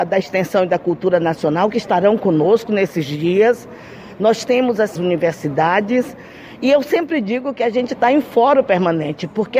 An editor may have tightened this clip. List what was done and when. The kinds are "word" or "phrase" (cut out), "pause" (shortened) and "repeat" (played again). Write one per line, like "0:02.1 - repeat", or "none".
0:05.0 - phrase